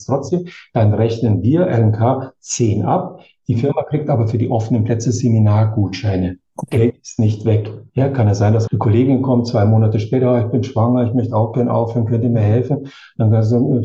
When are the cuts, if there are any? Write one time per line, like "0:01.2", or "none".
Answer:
0:08.7